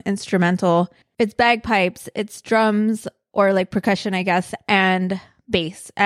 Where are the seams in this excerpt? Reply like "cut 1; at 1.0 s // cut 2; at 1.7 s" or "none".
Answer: cut 1; at 1.0 s